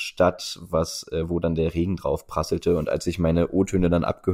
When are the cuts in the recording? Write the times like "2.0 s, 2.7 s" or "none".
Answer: none